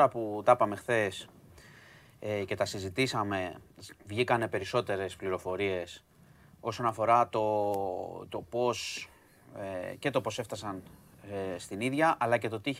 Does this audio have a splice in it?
no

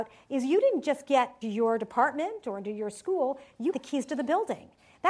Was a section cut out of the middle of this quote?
yes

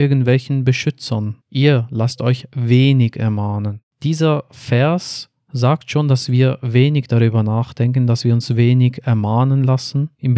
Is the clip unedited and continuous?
no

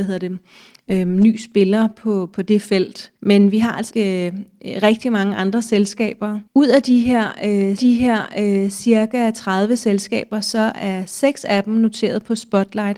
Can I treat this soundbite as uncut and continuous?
no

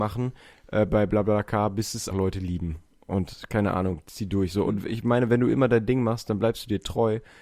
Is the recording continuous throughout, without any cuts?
no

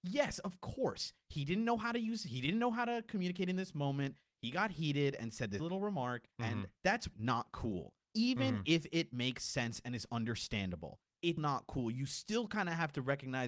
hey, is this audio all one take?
no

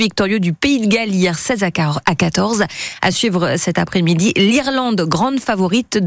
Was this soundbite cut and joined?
no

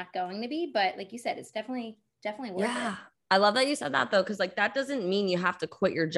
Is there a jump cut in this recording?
no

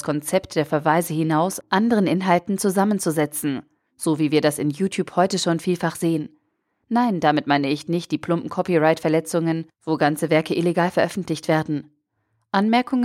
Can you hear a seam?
yes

